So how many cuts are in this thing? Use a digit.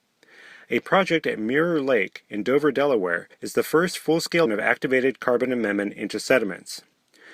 2